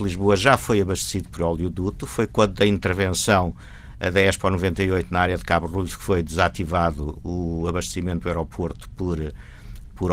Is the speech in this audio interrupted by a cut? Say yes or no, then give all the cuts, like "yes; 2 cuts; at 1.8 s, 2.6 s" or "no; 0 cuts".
no; 0 cuts